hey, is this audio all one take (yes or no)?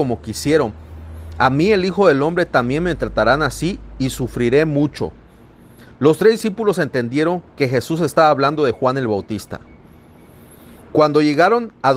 yes